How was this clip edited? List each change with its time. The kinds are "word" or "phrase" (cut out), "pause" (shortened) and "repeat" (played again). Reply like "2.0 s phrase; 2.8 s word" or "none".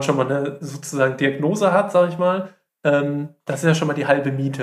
none